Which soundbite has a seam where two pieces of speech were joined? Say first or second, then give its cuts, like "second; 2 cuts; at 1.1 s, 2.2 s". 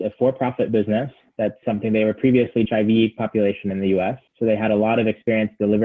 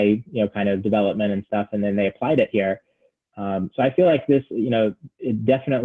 first; 3 cuts; at 1.6 s, 2.7 s, 4.3 s